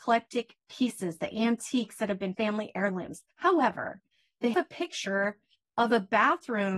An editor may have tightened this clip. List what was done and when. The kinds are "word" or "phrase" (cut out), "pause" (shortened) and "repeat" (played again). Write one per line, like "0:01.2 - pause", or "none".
0:02.3 - phrase
0:03.3 - pause
0:04.5 - word